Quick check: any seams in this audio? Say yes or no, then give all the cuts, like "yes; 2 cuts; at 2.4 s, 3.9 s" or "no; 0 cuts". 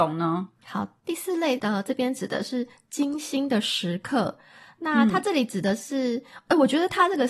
no; 0 cuts